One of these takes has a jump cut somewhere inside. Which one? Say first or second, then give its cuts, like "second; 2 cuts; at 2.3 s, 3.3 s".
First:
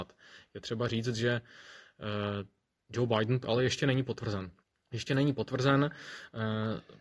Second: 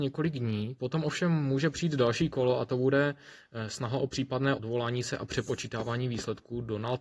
first; 2 cuts; at 3.4 s, 4.6 s